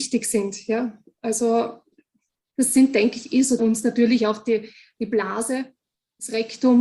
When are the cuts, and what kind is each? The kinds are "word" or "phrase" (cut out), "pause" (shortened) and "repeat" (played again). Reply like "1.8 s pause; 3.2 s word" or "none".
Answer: 3.6 s phrase

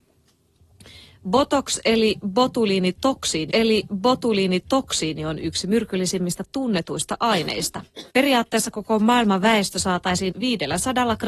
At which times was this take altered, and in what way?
3.5 s repeat; 8.1 s pause; 10.3 s word

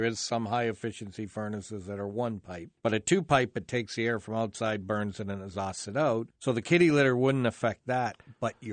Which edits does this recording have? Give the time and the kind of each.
2.8 s pause; 6.3 s pause

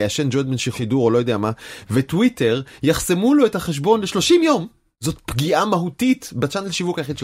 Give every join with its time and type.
none

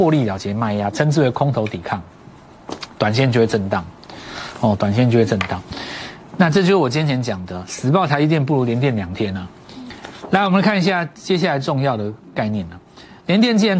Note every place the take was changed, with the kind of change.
11.2 s pause

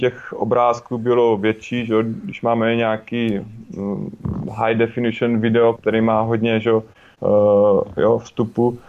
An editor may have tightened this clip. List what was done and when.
5.8 s word

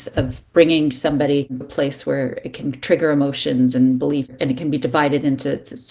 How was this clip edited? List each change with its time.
1.6 s word

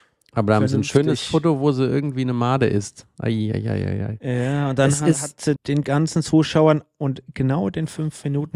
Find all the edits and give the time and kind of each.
5.6 s word

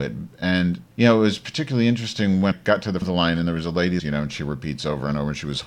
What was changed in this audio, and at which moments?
0.9 s pause; 2.5 s word; 3.0 s word; 4.0 s phrase

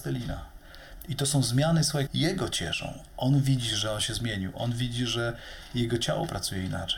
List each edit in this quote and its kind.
2.1 s word

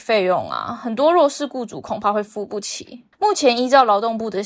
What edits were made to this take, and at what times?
3.1 s pause

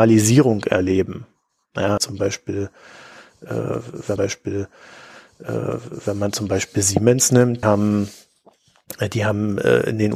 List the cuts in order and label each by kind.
2.0 s word; 4.2 s repeat; 7.6 s word

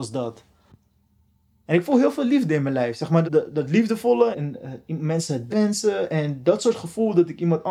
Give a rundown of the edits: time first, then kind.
3.2 s word; 4.3 s word; 5.5 s word

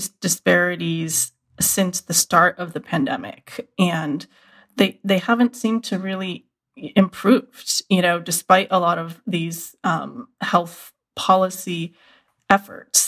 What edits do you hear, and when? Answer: none

